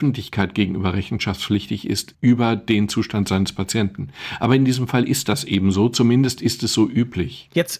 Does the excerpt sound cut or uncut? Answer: uncut